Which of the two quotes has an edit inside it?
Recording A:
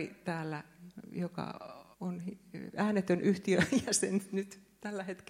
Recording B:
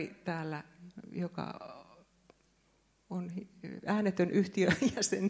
A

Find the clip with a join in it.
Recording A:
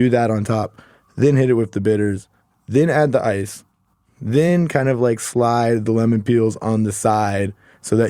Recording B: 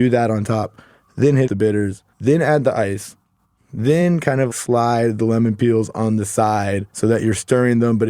B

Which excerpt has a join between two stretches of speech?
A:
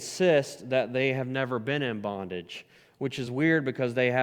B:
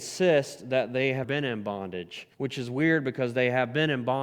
B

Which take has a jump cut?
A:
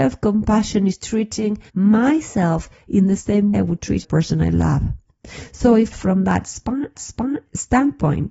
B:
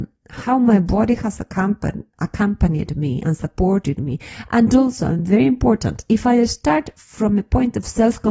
A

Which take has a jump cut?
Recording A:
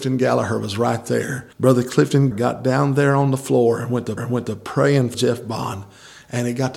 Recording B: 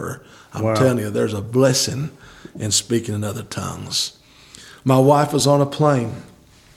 A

